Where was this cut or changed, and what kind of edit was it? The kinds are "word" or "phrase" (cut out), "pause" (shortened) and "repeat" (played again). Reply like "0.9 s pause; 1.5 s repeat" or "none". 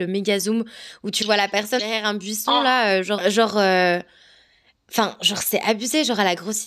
1.8 s word; 3.2 s word

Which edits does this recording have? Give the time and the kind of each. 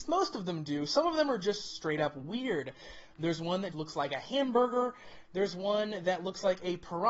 3.7 s word

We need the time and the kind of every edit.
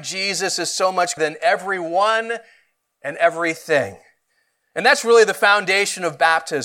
1.2 s word

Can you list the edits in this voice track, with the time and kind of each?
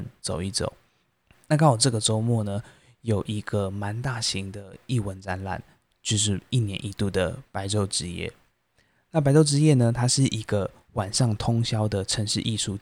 none

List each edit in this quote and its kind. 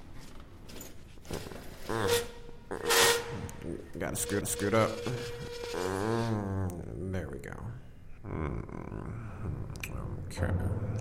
4.4 s repeat

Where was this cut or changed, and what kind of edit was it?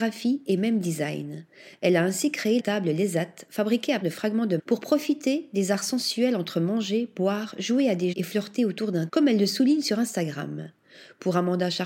2.6 s word; 4.0 s word; 4.6 s word; 8.1 s word; 9.1 s word

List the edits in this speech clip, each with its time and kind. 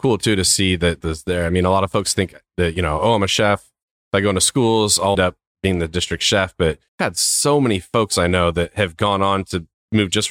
1.0 s phrase; 5.1 s phrase; 6.9 s pause

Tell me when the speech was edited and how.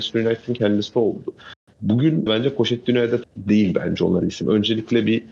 2.3 s word; 3.2 s word; 4.2 s word

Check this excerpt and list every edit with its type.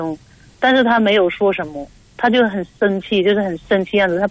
none

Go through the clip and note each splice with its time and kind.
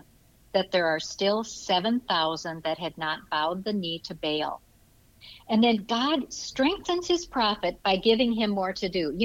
none

